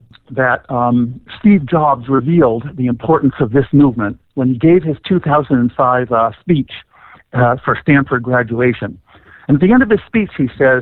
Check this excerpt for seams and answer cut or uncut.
uncut